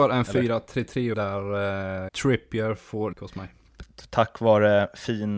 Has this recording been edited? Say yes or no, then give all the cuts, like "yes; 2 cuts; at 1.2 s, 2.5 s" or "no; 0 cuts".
yes; 3 cuts; at 1.1 s, 2.1 s, 3.1 s